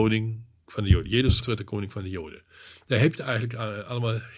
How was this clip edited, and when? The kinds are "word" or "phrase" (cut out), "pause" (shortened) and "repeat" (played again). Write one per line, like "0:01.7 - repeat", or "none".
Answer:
0:01.4 - word